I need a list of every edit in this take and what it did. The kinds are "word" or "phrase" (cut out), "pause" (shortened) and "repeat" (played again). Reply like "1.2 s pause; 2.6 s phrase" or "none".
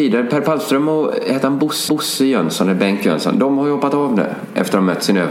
1.9 s repeat